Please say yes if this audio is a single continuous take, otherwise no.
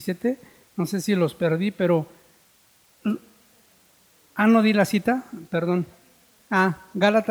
yes